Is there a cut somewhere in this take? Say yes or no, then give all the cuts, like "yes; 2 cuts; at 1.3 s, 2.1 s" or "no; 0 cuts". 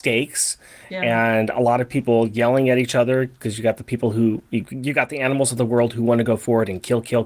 no; 0 cuts